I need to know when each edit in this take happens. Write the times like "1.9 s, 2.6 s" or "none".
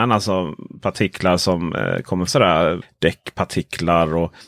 2.3 s